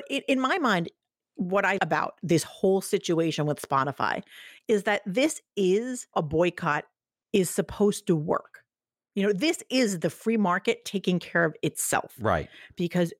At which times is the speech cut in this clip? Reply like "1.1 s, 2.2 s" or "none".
1.8 s, 6.1 s